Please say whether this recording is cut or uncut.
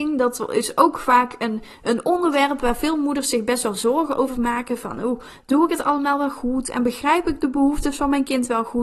uncut